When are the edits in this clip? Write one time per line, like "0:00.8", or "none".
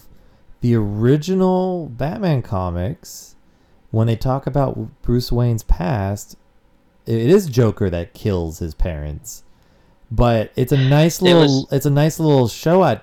none